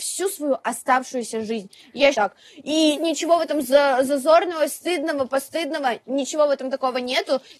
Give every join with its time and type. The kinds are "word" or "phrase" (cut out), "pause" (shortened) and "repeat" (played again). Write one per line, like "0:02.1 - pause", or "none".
0:02.1 - word
0:03.0 - word